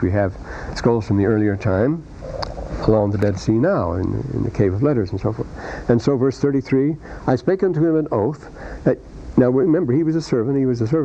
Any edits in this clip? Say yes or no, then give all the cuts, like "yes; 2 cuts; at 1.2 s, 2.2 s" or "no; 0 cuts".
no; 0 cuts